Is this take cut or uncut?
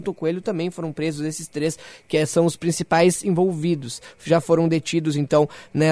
uncut